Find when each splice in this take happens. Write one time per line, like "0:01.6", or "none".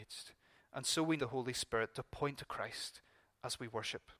0:01.2
0:02.3

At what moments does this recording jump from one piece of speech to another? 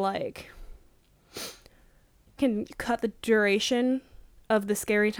0:02.4

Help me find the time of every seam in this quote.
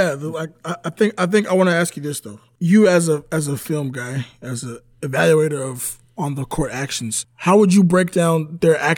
none

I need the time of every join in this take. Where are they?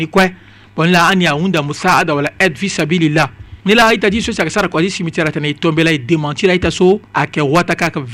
0:03.6
0:07.1

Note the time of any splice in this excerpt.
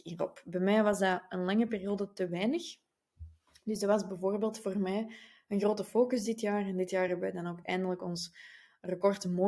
none

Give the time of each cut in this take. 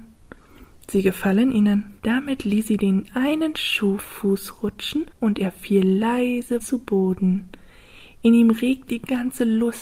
0:02.0
0:04.0
0:05.1
0:06.6
0:08.9

